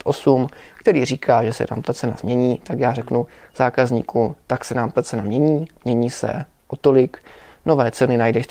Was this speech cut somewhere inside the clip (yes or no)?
no